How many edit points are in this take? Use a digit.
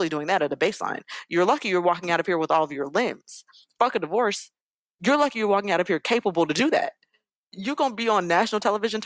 0